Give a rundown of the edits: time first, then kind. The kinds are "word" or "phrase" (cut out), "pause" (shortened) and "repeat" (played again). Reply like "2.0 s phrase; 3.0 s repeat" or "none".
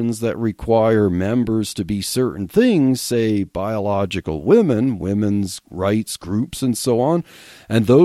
none